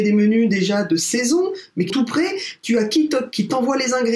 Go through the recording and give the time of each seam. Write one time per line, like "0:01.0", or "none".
0:01.9